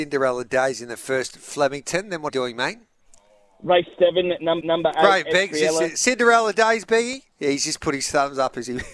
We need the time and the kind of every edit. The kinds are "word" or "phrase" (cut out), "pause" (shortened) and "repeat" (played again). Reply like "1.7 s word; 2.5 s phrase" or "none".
2.3 s phrase; 4.6 s repeat; 7.3 s pause